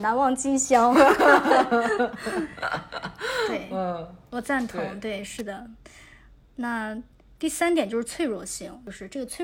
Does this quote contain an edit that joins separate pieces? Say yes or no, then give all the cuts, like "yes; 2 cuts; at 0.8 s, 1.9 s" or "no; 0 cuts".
no; 0 cuts